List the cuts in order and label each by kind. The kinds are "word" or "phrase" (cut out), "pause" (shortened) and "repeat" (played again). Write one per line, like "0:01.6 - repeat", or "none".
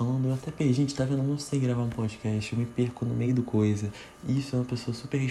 none

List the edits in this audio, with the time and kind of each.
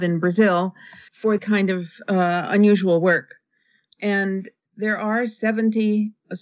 0:01.4 - word
0:04.7 - word

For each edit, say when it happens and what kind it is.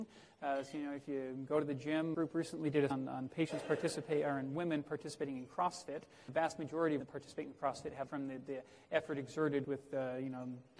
0:02.1 - word
0:02.9 - word
0:06.3 - word
0:07.0 - word
0:08.1 - word
0:09.6 - word

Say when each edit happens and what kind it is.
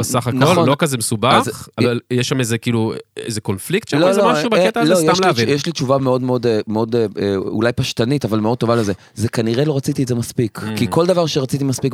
none

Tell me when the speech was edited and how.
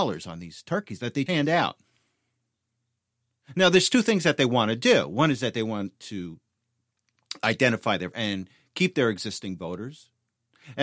0:01.3 - word
0:08.1 - word

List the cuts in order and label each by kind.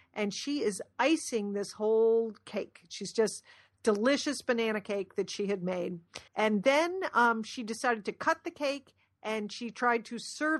0:06.3 - pause

